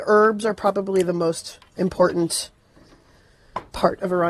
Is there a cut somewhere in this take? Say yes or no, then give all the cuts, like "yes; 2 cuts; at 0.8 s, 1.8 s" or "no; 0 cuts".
no; 0 cuts